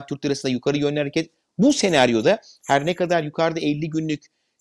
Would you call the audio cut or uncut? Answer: uncut